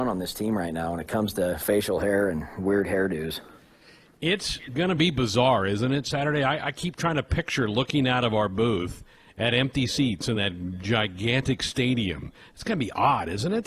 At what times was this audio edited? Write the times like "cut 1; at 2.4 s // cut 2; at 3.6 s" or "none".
none